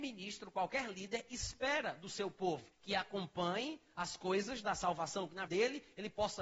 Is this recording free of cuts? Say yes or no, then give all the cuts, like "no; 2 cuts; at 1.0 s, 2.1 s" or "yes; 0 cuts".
no; 2 cuts; at 2.7 s, 5.5 s